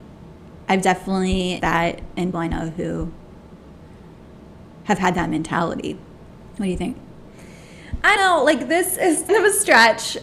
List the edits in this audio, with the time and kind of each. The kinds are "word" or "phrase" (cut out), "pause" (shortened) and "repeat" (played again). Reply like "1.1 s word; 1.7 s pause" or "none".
1.6 s word; 2.3 s word; 6.5 s word; 8.2 s word; 9.3 s word